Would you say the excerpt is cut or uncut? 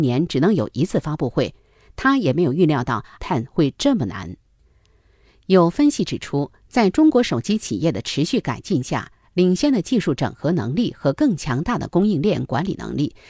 cut